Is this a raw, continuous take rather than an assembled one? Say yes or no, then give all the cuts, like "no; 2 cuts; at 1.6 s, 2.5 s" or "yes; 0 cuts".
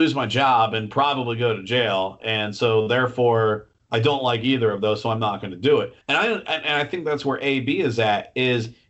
no; 1 cut; at 6.0 s